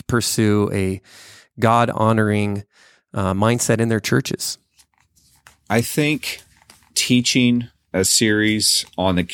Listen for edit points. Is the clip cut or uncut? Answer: uncut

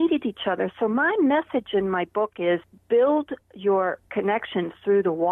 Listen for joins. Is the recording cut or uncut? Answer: uncut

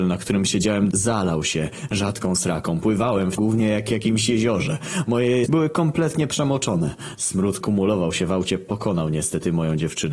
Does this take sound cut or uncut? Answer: cut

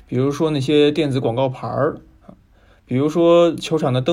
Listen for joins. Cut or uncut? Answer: uncut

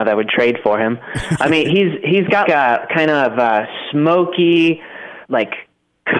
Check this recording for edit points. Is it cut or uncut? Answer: cut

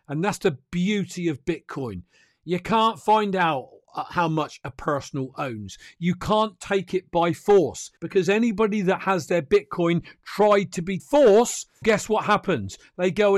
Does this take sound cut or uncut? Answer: cut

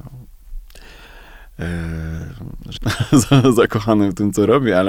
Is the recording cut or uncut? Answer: cut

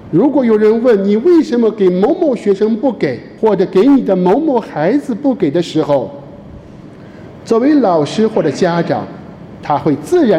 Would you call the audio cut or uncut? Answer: cut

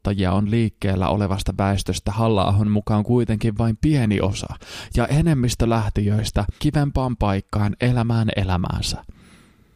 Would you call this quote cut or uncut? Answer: cut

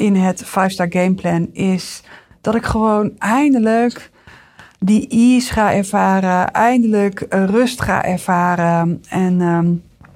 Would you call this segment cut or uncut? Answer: uncut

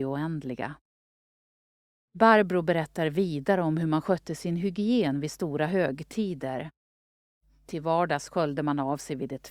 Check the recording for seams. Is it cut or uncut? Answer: uncut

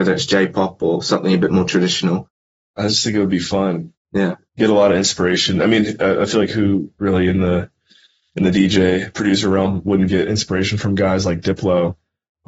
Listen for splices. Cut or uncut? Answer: uncut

